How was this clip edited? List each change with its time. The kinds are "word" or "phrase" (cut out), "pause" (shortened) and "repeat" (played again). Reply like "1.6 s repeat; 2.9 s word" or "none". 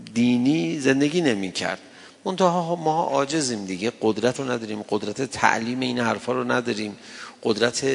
4.4 s word